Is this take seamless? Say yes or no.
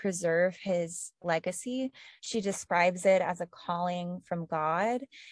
yes